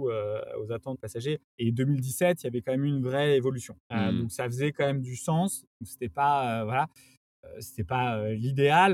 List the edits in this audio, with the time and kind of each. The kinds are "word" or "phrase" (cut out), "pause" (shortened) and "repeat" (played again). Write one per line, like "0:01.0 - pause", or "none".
0:01.0 - phrase
0:01.5 - pause
0:03.8 - pause